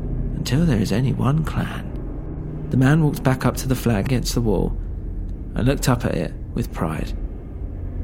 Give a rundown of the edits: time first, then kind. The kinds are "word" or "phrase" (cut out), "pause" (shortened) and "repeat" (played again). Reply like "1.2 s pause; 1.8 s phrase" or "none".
4.1 s word